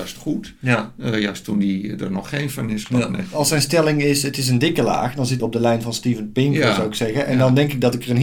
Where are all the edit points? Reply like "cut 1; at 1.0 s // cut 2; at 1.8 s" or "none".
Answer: cut 1; at 2.8 s // cut 2; at 5.4 s